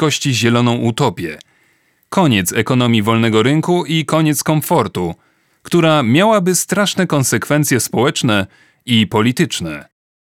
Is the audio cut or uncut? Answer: uncut